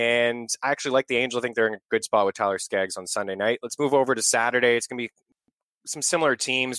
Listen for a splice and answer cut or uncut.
uncut